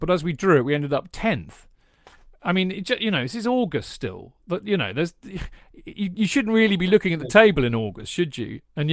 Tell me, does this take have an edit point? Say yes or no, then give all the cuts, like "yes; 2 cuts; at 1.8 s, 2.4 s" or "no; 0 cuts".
no; 0 cuts